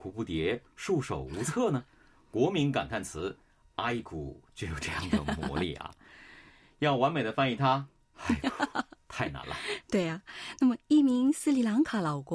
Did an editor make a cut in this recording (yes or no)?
no